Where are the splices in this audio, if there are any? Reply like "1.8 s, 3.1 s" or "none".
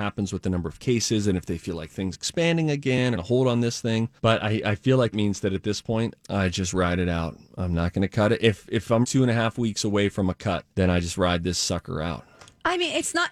2.1 s, 3.1 s, 4.2 s, 5.1 s, 6.2 s, 9.0 s, 10.7 s